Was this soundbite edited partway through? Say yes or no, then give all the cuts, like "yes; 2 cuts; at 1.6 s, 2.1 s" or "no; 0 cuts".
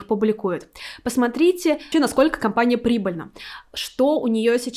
yes; 1 cut; at 1.9 s